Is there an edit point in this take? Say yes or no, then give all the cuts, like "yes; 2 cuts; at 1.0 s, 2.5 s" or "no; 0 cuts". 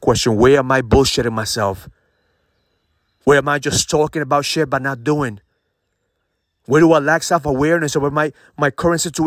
no; 0 cuts